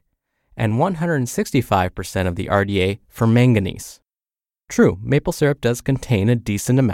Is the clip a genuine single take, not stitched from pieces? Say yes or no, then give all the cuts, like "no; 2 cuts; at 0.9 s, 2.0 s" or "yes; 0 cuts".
yes; 0 cuts